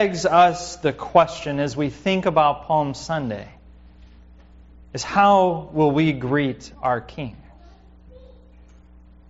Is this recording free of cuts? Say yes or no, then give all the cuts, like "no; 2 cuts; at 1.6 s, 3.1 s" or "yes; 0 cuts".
yes; 0 cuts